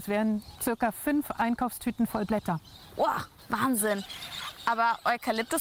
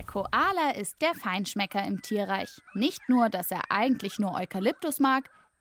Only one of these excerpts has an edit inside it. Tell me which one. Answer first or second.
second